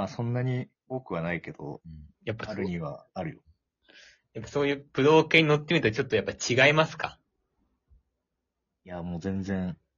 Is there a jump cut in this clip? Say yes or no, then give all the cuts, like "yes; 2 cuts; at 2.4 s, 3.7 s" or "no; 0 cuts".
yes; 1 cut; at 2.1 s